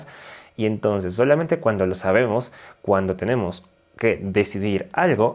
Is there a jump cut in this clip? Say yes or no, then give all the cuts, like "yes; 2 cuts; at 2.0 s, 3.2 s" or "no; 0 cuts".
no; 0 cuts